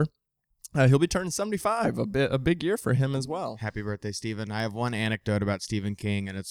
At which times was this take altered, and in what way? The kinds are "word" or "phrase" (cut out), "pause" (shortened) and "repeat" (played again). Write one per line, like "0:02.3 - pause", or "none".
none